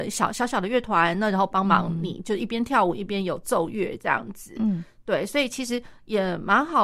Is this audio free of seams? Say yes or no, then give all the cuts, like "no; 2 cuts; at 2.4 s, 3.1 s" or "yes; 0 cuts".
yes; 0 cuts